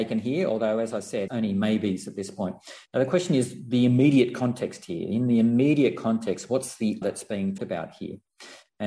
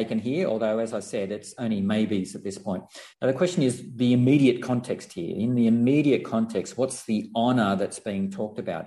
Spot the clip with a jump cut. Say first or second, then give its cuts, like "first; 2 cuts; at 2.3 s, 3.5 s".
first; 3 cuts; at 1.3 s, 7.0 s, 7.6 s